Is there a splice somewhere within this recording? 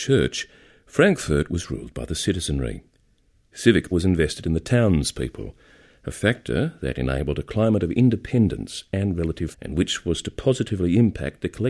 yes; 2 cuts; at 3.9 s, 9.5 s

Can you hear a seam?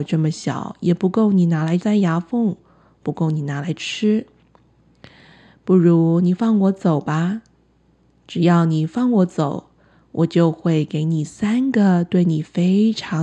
no; 0 cuts

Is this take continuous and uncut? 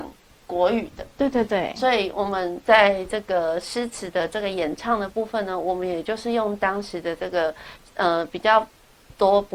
yes; 0 cuts

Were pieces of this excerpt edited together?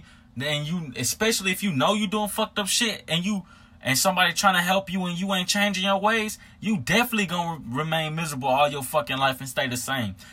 no; 0 cuts

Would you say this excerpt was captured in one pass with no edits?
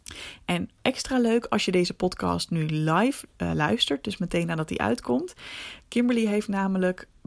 yes; 0 cuts

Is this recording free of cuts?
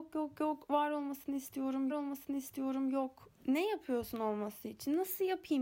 no; 1 cut; at 1.9 s

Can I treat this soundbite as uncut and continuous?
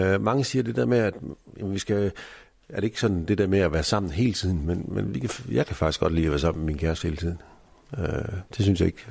yes; 0 cuts

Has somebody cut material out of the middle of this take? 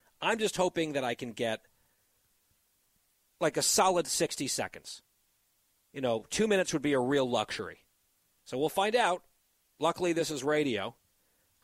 no; 0 cuts

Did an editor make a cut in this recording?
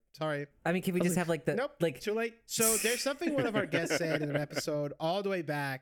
no; 0 cuts

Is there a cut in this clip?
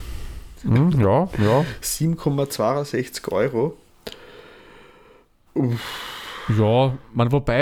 no; 0 cuts

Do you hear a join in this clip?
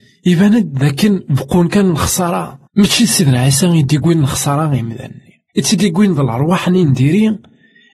yes; 2 cuts; at 2.7 s, 5.5 s

